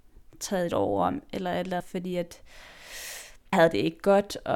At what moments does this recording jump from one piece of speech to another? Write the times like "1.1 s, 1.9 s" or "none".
1.8 s, 3.5 s